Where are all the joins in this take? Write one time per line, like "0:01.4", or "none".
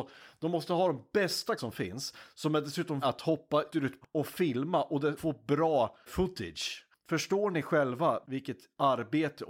0:01.6
0:03.0
0:03.7
0:04.0
0:05.2
0:06.1
0:08.2